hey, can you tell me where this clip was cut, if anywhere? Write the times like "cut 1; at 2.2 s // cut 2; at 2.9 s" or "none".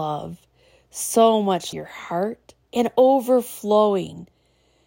cut 1; at 1.7 s // cut 2; at 2.6 s